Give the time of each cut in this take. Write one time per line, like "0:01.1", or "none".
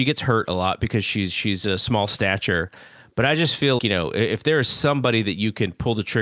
0:03.8

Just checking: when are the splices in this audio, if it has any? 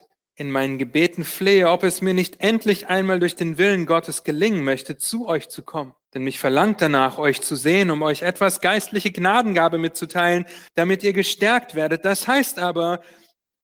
0:06.0
0:10.7

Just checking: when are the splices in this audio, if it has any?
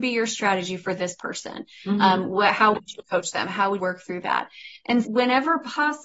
0:03.8
0:05.0

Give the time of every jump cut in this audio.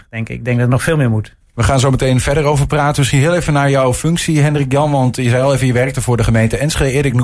none

